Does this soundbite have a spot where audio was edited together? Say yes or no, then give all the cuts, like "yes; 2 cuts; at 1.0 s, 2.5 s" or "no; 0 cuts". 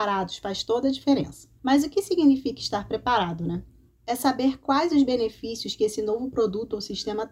no; 0 cuts